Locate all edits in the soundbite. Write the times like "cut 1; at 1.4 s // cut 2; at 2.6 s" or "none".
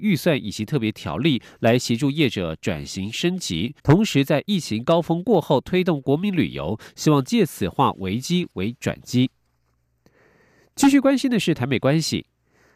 cut 1; at 3.8 s